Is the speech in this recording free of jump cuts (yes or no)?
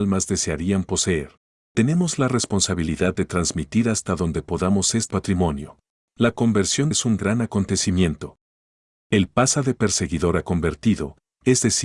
no